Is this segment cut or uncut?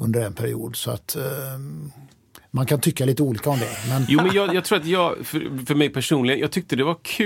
uncut